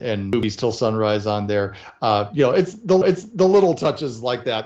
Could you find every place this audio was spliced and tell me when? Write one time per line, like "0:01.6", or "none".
0:03.0